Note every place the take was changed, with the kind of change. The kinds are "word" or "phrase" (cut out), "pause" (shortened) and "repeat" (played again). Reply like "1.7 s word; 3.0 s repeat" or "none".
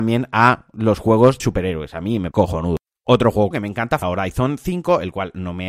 1.4 s word; 2.3 s word; 3.5 s word; 4.0 s word